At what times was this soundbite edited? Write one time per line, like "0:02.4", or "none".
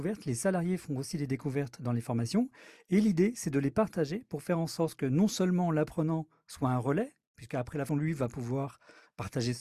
0:07.9